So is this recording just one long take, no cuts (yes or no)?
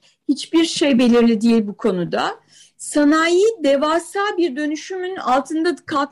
yes